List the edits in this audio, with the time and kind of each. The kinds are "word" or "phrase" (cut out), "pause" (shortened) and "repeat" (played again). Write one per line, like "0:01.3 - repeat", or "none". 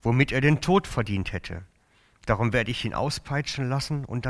none